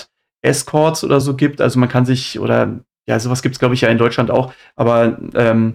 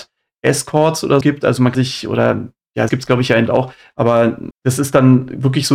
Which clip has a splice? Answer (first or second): second